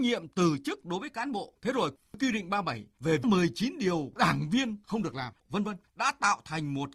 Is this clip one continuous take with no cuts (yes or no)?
yes